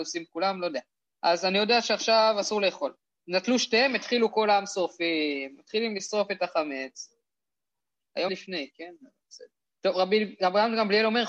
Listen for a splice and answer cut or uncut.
cut